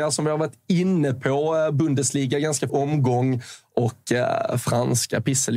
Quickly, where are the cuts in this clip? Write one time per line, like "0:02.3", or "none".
0:02.7